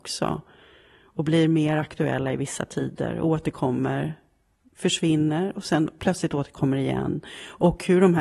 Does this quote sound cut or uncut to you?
uncut